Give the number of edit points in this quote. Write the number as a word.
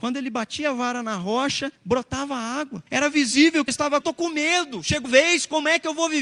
five